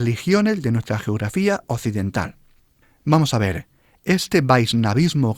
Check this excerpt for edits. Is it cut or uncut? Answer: uncut